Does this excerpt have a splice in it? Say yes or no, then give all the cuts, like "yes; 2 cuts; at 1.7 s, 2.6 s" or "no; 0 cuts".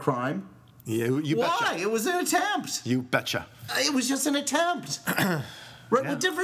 yes; 1 cut; at 3.7 s